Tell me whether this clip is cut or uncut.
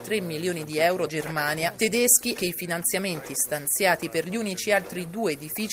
cut